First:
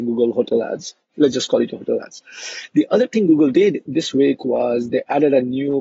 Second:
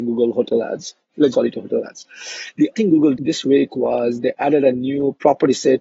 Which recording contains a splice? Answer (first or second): second